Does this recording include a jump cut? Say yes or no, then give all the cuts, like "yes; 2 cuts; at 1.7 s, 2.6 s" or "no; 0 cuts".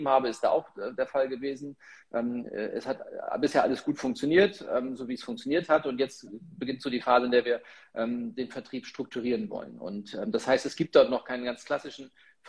no; 0 cuts